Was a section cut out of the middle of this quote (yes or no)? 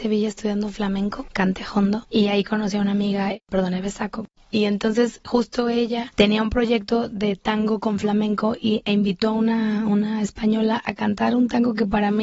no